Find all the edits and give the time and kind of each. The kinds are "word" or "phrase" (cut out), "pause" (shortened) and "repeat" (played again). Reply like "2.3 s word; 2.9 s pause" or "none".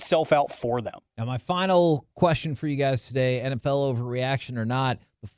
1.1 s pause